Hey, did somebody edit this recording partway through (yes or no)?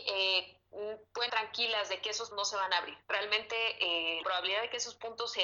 yes